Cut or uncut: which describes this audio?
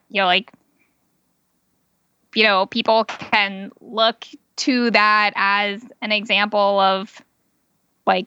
uncut